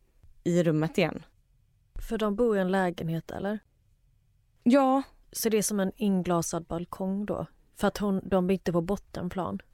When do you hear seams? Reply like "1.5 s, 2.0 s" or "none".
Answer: none